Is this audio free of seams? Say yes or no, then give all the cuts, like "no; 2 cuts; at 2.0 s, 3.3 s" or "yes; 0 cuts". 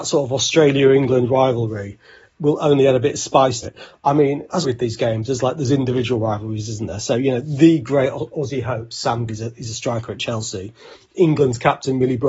no; 3 cuts; at 3.6 s, 4.6 s, 9.3 s